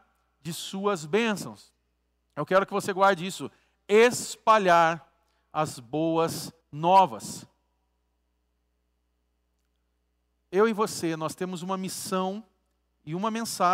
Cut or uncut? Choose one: cut